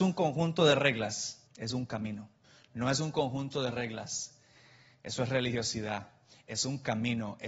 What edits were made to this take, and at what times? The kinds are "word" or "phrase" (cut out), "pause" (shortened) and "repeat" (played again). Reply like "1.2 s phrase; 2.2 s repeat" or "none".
1.5 s pause; 2.4 s pause